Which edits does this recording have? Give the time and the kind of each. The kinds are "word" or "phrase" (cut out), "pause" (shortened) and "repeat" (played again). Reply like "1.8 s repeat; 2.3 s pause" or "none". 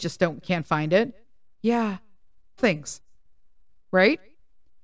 2.6 s word